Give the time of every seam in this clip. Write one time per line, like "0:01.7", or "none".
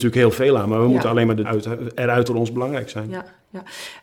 0:01.4
0:02.3